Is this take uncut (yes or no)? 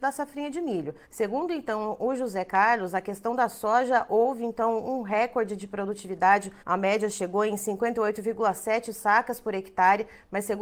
no